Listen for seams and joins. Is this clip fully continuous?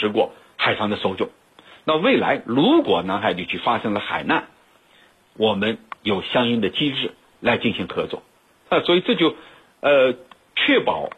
yes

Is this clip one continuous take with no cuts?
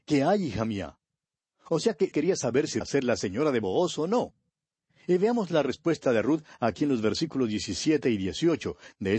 no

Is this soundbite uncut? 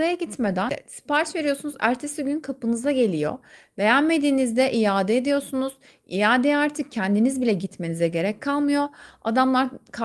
yes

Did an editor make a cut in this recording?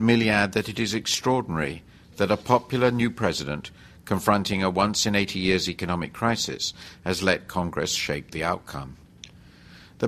no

